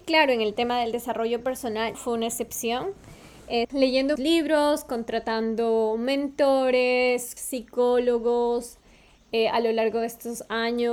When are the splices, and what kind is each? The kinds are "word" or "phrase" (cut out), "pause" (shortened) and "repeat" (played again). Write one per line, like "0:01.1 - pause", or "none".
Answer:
0:01.9 - word
0:03.6 - word
0:04.2 - word
0:07.4 - word